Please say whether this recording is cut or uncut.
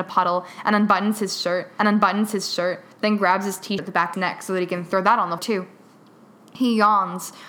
cut